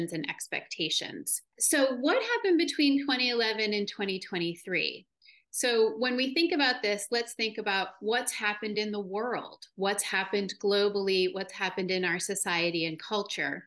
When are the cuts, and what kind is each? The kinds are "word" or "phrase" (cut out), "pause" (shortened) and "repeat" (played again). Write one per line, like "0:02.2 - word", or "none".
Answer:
none

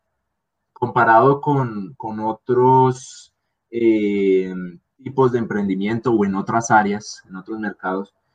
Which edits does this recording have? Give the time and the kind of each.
0:04.9 - pause

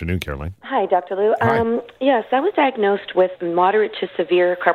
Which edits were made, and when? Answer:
0:03.4 - word

